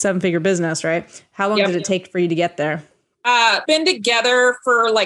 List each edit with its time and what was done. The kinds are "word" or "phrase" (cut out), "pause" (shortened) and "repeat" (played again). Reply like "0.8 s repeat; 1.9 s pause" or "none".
3.7 s word